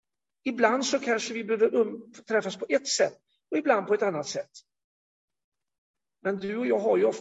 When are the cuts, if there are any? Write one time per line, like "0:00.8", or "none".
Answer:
none